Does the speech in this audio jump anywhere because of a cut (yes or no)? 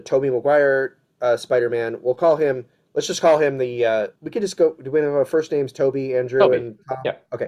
yes